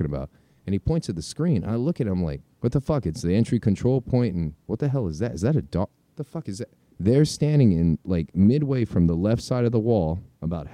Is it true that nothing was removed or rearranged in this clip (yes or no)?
no